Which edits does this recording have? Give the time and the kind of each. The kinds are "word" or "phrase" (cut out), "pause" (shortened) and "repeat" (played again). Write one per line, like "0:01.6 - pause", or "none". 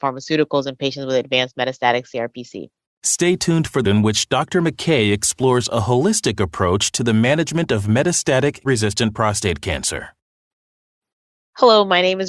0:02.8 - pause
0:03.8 - phrase
0:08.6 - word